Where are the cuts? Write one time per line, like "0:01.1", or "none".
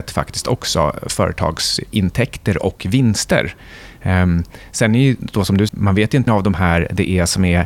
0:05.7
0:06.3